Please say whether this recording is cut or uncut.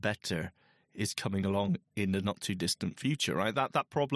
uncut